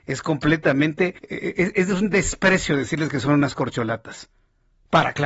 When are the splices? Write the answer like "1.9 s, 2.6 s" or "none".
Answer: 1.2 s